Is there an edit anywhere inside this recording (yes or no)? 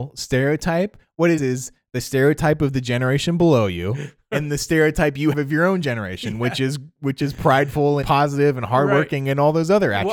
yes